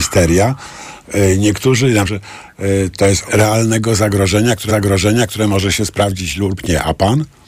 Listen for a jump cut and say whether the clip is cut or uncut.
cut